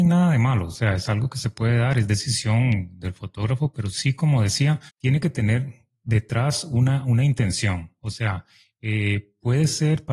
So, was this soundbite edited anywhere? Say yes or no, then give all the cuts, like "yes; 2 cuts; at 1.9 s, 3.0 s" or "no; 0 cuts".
yes; 1 cut; at 4.9 s